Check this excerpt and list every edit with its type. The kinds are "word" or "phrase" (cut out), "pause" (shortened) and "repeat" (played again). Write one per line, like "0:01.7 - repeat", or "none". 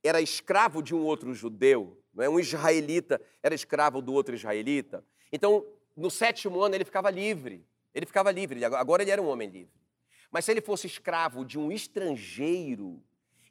none

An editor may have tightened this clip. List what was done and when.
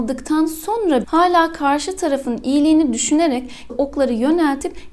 0:01.0 - word
0:03.7 - word

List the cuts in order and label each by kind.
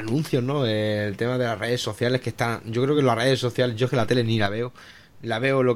none

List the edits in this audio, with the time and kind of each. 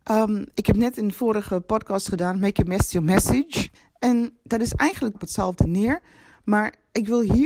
0:03.7 - pause
0:05.1 - phrase

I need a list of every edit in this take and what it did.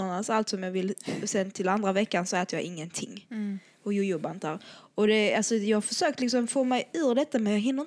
none

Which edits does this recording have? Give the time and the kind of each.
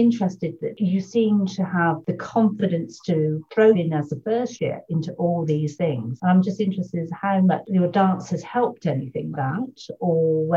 0:03.7 - word
0:09.3 - word

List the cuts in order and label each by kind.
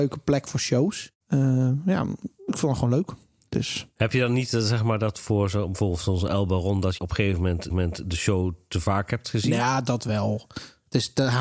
0:01.2 - pause
0:07.0 - word
0:07.7 - repeat

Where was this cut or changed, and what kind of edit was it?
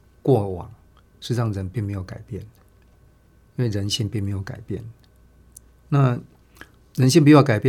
0:05.7 - pause

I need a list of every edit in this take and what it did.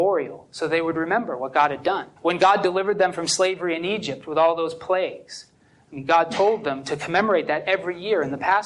0:02.2 - pause

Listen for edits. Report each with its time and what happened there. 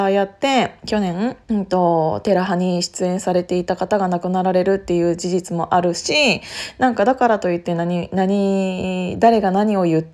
0:01.4 - pause

